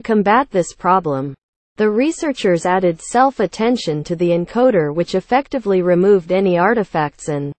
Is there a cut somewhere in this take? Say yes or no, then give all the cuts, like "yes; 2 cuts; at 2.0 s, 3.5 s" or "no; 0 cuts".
no; 0 cuts